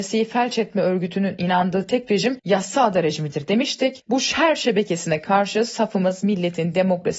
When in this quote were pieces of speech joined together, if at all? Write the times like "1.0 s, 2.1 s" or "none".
none